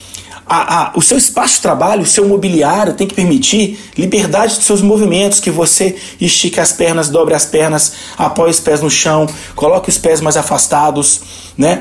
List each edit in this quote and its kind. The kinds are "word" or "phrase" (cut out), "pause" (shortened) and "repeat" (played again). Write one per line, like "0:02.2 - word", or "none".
none